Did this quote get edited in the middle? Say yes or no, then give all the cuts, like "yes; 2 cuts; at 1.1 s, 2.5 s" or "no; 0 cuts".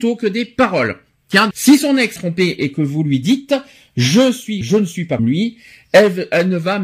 yes; 4 cuts; at 1.5 s, 2.2 s, 4.6 s, 5.2 s